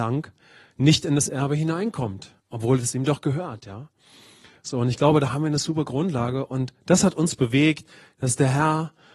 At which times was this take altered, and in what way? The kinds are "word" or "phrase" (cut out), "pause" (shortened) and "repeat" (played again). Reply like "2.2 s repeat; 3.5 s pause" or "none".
2.4 s pause